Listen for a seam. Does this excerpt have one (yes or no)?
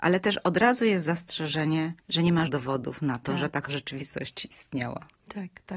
yes